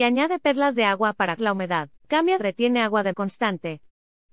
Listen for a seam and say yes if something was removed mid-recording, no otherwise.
yes